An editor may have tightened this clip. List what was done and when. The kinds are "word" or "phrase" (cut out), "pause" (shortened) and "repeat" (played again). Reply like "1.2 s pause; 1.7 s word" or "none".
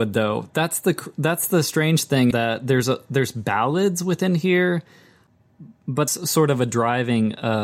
2.3 s word; 6.1 s phrase